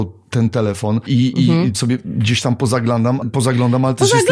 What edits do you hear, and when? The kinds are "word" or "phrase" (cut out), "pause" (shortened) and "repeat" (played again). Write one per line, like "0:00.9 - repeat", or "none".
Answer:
0:01.1 - word
0:01.7 - word
0:03.2 - word